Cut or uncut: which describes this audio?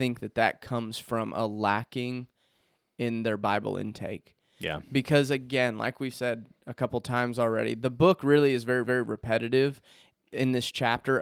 cut